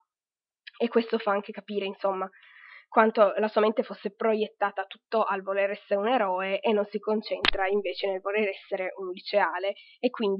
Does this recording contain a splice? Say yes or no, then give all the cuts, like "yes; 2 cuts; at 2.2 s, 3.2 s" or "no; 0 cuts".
no; 0 cuts